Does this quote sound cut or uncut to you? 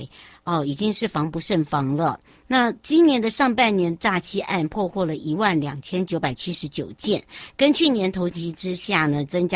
uncut